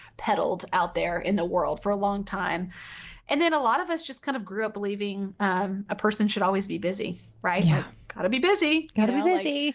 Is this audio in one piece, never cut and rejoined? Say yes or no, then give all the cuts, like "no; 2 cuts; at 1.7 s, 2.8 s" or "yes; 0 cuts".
yes; 0 cuts